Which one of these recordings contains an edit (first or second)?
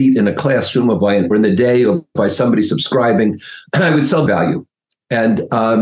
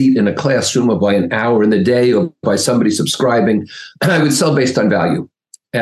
first